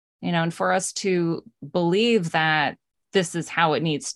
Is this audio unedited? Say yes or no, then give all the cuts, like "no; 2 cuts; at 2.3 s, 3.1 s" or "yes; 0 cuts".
no; 1 cut; at 3.0 s